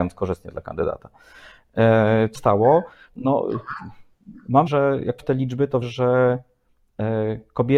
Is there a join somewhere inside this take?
yes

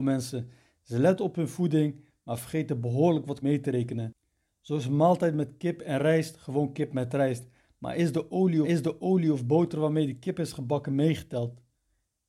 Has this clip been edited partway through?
yes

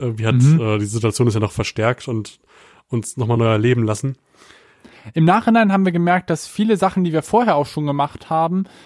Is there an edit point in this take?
no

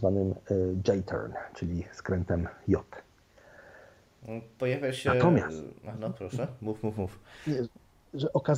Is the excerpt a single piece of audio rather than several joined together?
yes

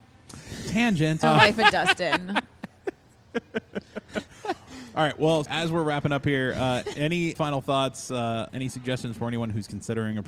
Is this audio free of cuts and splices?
no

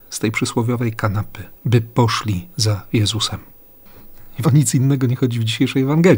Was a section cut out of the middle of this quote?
yes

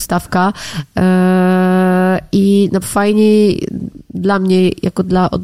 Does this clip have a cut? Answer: yes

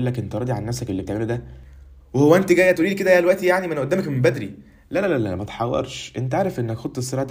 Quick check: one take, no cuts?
yes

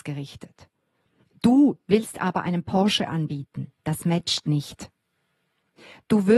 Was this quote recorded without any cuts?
no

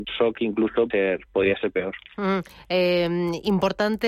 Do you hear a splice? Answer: yes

